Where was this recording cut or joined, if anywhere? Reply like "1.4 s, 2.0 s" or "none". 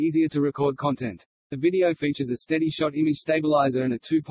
1.9 s